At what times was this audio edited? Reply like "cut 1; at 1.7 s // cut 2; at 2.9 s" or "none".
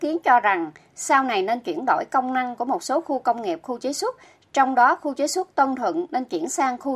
none